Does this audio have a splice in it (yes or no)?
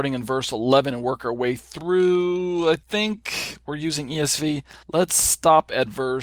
yes